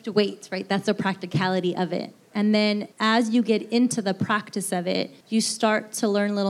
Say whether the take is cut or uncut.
cut